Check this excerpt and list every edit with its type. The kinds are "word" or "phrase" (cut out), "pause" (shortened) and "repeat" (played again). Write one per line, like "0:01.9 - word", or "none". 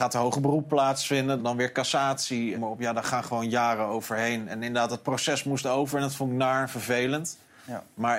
0:01.4 - word
0:02.5 - phrase